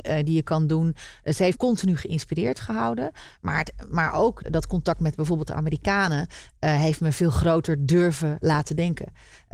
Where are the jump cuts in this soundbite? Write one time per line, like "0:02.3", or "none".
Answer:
0:01.5
0:04.4
0:08.4